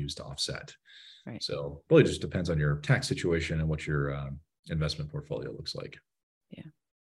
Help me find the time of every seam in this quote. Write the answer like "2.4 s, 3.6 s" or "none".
none